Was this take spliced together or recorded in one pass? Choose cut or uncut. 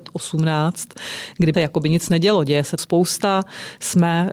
cut